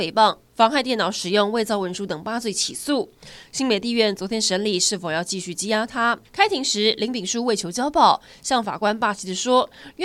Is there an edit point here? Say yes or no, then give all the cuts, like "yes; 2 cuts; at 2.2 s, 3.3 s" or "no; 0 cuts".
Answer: yes; 1 cut; at 6.2 s